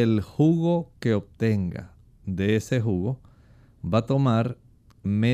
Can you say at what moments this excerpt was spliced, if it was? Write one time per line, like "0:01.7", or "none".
none